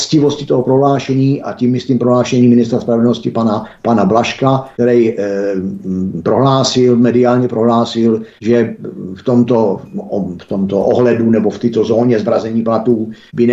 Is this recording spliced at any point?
no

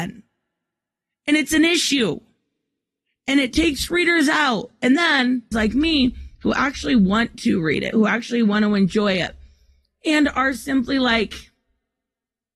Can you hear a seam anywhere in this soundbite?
yes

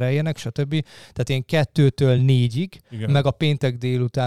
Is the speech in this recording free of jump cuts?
yes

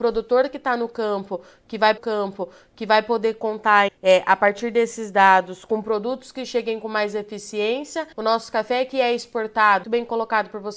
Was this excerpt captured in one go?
no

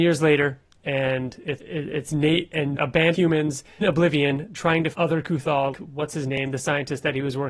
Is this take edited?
yes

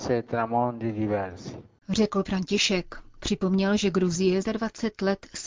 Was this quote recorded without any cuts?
no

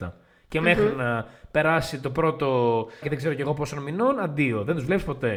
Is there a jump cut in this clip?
yes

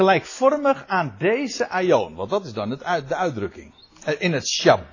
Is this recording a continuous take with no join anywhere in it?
yes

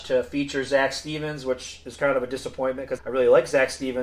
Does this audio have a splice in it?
yes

